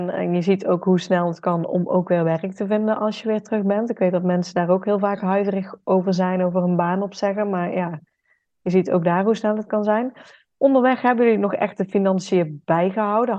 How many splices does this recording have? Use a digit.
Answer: 0